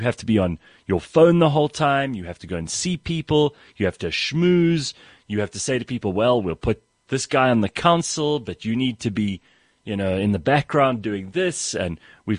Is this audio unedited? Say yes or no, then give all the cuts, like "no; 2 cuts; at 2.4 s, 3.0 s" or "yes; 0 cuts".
yes; 0 cuts